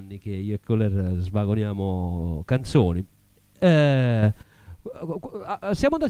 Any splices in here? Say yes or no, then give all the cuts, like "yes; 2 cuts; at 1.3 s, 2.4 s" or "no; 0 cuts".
no; 0 cuts